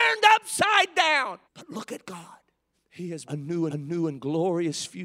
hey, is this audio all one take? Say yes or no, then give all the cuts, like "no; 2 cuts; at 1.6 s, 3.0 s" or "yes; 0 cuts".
no; 4 cuts; at 1.4 s, 2.7 s, 3.2 s, 3.7 s